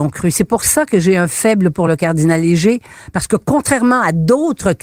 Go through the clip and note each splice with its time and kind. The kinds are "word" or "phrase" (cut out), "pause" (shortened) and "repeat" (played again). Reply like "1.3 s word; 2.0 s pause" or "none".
none